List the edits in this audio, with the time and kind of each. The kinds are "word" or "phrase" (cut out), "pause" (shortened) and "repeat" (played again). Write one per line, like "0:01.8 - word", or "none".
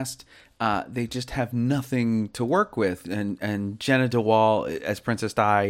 none